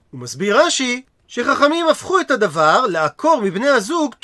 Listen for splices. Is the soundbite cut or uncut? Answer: uncut